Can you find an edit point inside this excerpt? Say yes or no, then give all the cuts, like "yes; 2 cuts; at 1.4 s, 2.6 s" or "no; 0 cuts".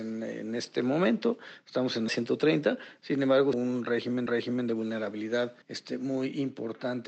yes; 4 cuts; at 2.1 s, 3.5 s, 4.3 s, 5.6 s